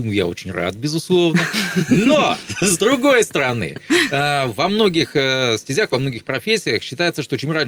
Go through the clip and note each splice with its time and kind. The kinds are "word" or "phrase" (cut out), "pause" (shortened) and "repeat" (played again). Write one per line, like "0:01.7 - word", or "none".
none